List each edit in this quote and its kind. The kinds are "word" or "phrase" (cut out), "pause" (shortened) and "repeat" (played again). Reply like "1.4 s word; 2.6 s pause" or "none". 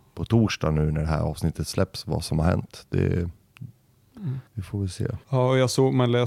4.5 s pause; 5.2 s pause